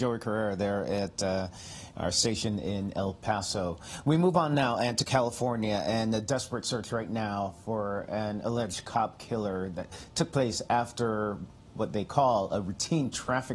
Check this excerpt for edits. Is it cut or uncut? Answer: uncut